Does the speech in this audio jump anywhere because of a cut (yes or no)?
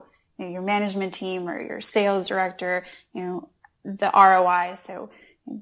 no